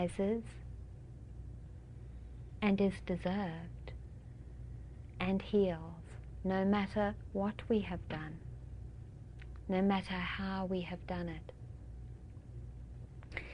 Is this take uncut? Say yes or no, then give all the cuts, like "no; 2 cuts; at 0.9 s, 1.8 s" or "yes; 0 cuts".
yes; 0 cuts